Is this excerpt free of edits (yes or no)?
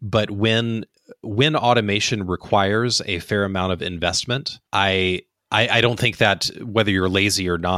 no